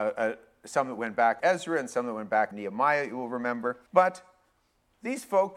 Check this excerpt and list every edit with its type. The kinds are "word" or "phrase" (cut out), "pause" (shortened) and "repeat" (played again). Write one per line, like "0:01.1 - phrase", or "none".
0:01.4 - word
0:02.5 - word
0:03.9 - pause